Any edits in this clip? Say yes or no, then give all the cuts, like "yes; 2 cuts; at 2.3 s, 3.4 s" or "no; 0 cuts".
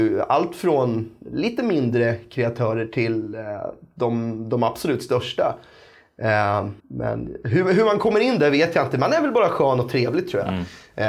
yes; 1 cut; at 6.8 s